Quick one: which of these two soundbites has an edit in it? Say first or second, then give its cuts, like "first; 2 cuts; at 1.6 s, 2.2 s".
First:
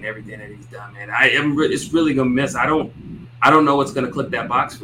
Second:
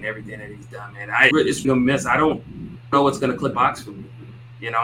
second; 4 cuts; at 1.3 s, 1.6 s, 2.9 s, 3.5 s